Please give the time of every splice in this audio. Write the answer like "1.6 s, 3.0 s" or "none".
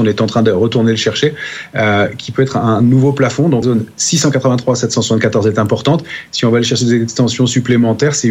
3.6 s